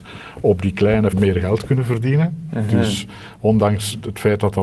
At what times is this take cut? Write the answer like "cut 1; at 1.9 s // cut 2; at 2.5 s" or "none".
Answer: cut 1; at 1.1 s